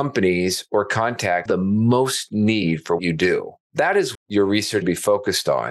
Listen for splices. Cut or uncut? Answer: cut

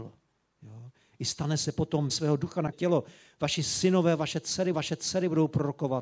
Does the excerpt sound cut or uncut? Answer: cut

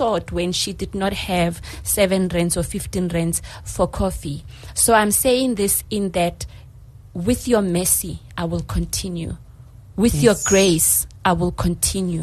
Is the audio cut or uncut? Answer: uncut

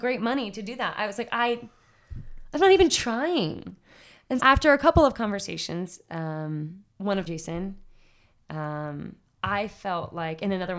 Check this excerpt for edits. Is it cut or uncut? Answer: cut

